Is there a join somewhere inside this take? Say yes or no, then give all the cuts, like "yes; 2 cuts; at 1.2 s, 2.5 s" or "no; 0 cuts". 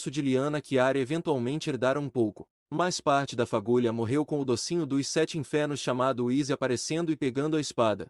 yes; 1 cut; at 2.6 s